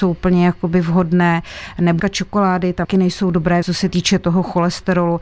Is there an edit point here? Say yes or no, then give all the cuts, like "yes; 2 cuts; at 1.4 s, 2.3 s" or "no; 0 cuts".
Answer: yes; 3 cuts; at 2.0 s, 2.8 s, 3.6 s